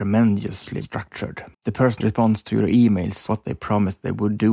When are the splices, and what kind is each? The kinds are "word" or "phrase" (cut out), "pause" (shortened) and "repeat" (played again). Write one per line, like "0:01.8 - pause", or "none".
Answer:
0:01.5 - pause
0:02.0 - word
0:03.3 - word